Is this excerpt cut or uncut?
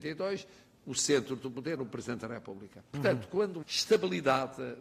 cut